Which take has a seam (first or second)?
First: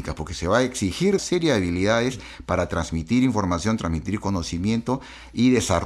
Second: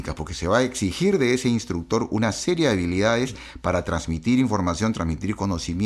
first